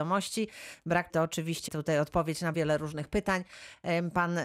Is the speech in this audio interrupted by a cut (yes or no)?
yes